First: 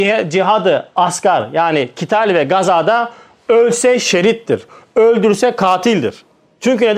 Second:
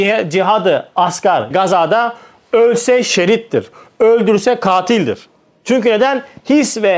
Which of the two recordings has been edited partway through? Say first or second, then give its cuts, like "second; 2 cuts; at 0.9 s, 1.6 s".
second; 1 cut; at 1.5 s